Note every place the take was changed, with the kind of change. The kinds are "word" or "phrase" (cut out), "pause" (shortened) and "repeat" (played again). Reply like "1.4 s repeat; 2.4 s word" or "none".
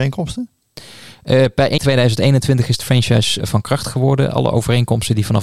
1.8 s word; 2.8 s word; 3.4 s word